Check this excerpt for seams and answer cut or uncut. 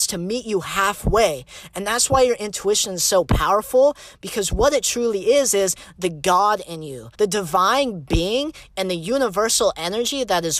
cut